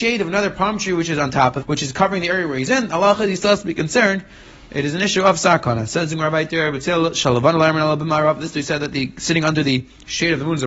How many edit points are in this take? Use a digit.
1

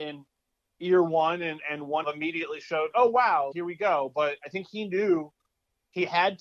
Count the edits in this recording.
3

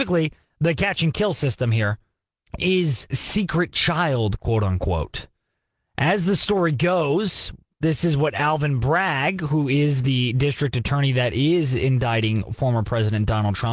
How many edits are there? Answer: 1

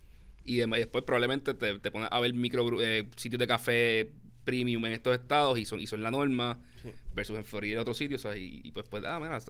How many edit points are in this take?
0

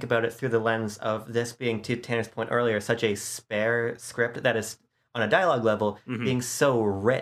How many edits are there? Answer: 0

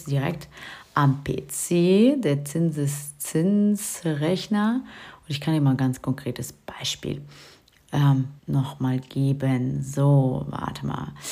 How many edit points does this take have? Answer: 1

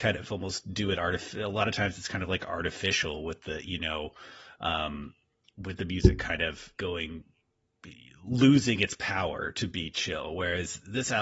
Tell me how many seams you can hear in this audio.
1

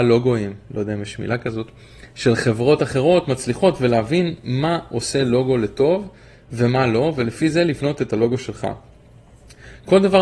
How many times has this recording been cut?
0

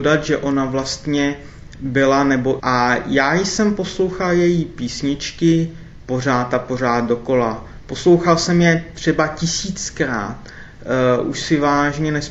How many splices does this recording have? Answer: 1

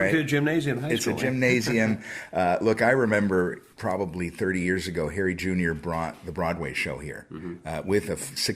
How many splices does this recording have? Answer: 1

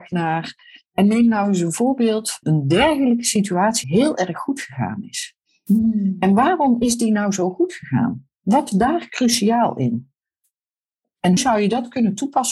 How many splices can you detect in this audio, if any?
4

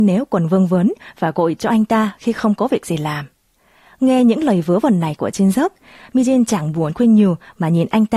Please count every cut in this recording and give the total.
0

